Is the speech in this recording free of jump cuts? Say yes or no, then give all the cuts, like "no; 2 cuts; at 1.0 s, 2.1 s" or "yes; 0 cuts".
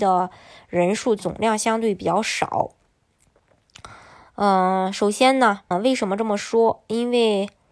no; 1 cut; at 5.7 s